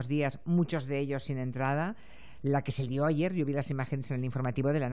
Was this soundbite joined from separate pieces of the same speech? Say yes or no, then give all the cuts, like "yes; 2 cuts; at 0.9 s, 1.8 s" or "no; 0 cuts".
no; 0 cuts